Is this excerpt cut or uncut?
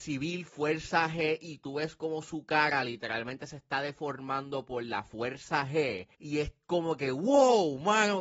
cut